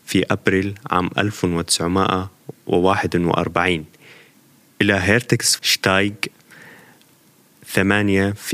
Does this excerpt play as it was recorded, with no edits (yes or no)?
no